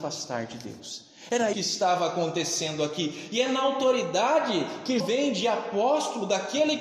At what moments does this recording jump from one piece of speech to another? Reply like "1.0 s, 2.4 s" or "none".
1.5 s, 5.0 s